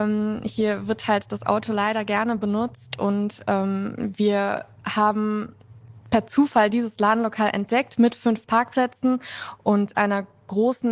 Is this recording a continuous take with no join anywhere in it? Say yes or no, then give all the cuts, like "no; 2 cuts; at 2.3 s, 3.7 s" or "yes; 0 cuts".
yes; 0 cuts